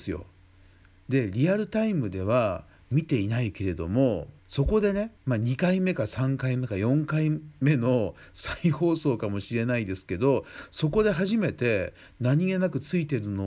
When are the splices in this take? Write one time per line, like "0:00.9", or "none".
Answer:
0:04.4
0:05.2